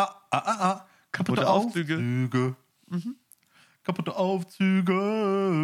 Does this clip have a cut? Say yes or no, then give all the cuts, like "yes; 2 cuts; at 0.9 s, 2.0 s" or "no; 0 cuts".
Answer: no; 0 cuts